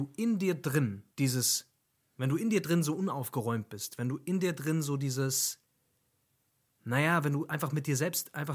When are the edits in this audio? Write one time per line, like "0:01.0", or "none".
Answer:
0:01.1